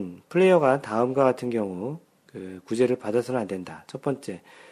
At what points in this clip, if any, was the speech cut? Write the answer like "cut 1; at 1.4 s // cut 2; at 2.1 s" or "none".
none